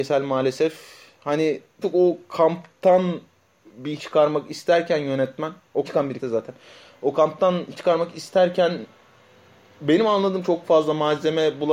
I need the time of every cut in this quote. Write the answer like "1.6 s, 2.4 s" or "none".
1.8 s, 4.0 s, 5.8 s, 6.2 s, 7.8 s, 10.4 s